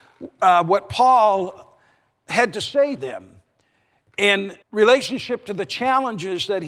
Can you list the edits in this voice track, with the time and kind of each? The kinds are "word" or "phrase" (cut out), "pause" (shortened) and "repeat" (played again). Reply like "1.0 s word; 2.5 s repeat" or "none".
3.0 s word; 4.6 s pause